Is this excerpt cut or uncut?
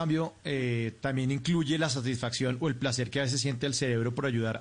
uncut